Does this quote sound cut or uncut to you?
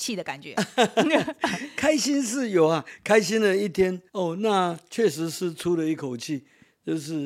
cut